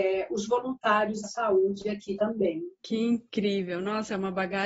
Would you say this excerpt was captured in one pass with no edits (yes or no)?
no